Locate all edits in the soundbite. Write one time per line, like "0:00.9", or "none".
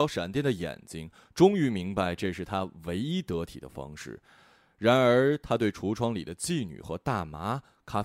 none

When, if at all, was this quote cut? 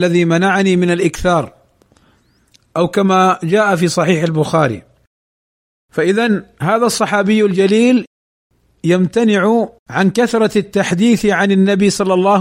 0:09.8

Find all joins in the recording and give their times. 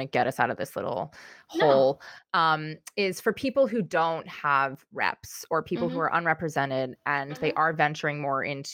none

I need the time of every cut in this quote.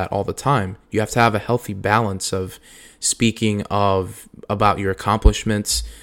none

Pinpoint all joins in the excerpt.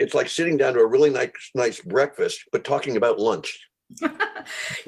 0:02.5

